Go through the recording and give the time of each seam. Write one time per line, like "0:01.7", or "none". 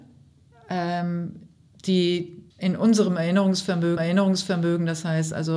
0:02.5
0:04.0